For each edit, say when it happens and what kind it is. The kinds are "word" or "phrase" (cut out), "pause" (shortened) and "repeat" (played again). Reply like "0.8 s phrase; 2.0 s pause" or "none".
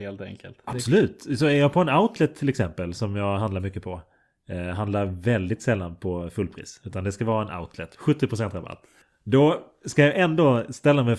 none